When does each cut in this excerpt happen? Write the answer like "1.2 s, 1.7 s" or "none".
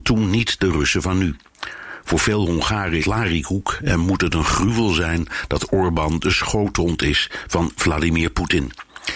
3.0 s